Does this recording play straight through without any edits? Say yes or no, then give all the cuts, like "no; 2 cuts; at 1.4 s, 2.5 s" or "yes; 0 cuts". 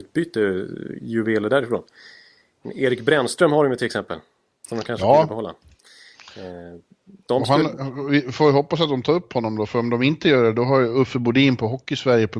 yes; 0 cuts